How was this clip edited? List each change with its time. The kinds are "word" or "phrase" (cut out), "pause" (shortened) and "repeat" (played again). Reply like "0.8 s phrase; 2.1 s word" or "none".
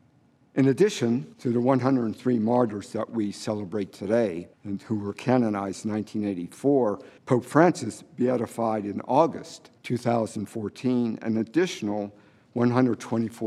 1.3 s pause; 4.5 s pause; 7.2 s pause; 9.8 s pause